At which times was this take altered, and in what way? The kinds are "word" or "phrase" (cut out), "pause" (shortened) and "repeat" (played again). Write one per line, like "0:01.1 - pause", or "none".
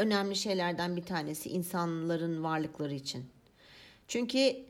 none